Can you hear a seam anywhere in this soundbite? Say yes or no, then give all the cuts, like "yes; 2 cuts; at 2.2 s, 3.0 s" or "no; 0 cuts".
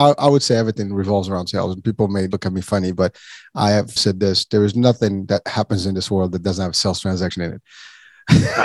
yes; 2 cuts; at 2.3 s, 4.0 s